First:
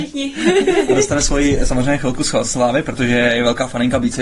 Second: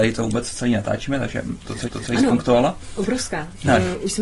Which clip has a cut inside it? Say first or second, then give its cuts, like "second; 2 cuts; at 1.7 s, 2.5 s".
second; 1 cut; at 1.8 s